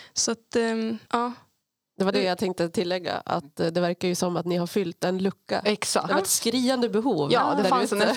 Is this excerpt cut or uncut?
cut